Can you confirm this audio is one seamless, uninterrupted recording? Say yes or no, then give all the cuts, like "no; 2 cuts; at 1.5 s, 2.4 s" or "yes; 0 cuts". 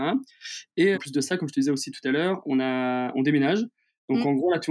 no; 1 cut; at 0.9 s